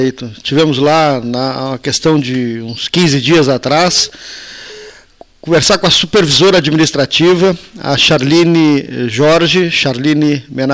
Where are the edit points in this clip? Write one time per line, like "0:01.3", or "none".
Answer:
none